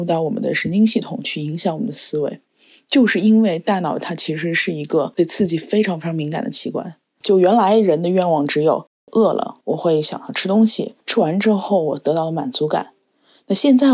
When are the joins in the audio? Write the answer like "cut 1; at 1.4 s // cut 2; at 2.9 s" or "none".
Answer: cut 1; at 9.6 s // cut 2; at 11.0 s